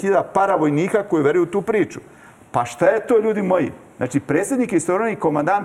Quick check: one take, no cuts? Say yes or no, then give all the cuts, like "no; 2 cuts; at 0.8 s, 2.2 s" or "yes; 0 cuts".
yes; 0 cuts